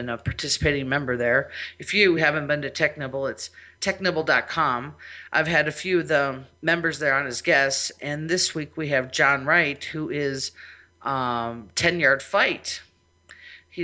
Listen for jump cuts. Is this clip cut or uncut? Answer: uncut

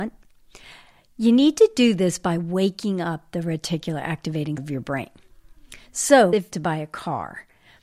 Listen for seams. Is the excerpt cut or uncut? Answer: cut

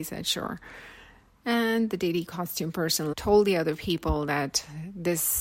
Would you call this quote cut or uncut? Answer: cut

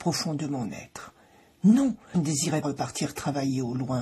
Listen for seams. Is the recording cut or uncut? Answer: cut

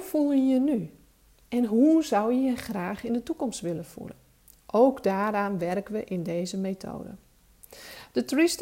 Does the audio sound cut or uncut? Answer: uncut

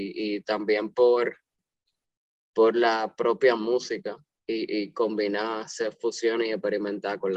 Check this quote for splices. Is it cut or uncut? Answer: uncut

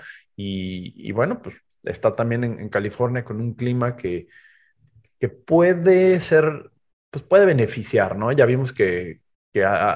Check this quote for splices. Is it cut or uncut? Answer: uncut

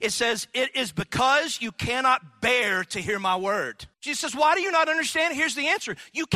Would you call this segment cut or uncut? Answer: cut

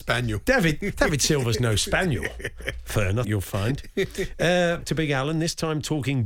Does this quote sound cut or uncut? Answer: cut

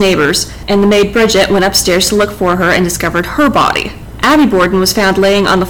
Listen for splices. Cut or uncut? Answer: uncut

